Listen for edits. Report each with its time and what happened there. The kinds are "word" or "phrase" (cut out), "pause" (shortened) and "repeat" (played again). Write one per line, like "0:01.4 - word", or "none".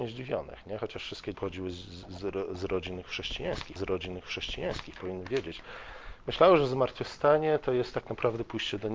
0:01.3 - word
0:03.8 - repeat